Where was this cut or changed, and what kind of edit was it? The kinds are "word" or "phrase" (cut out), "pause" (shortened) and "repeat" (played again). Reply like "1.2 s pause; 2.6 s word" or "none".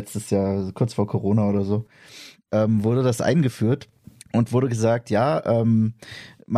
4.0 s pause

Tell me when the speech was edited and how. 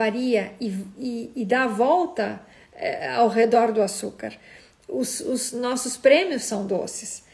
none

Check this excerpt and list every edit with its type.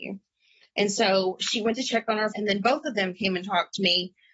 2.3 s word

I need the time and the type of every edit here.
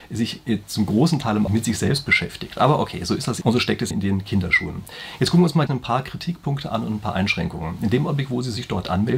1.5 s word; 3.4 s word; 3.9 s word; 5.7 s word

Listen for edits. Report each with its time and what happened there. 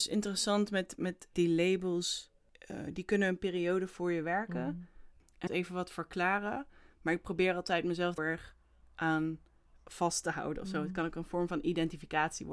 5.5 s phrase; 8.2 s phrase

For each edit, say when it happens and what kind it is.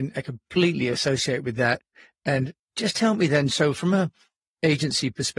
none

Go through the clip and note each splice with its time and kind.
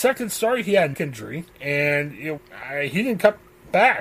0.9 s word; 1.5 s pause; 2.4 s word

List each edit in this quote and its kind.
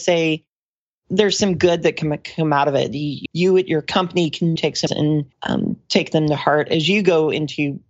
3.3 s word; 4.6 s word; 4.9 s phrase; 5.3 s pause

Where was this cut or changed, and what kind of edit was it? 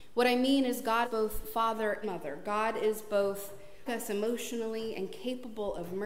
1.0 s word; 2.0 s word; 3.9 s word

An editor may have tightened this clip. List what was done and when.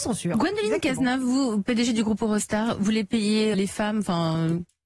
3.5 s word

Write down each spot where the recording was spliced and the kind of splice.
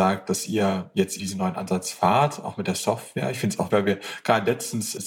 1.2 s word; 3.7 s word

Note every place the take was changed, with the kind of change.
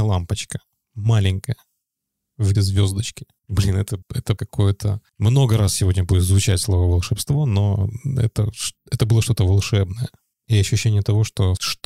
2.5 s word; 4.0 s word; 4.4 s word

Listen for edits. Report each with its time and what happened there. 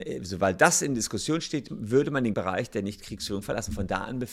1.7 s word; 2.3 s word

